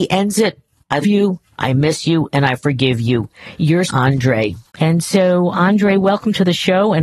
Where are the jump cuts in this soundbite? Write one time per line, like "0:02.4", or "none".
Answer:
0:01.0
0:03.9
0:04.7
0:05.5